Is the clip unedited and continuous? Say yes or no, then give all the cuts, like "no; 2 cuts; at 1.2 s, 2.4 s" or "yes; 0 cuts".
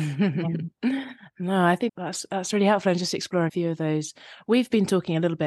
no; 2 cuts; at 1.9 s, 3.5 s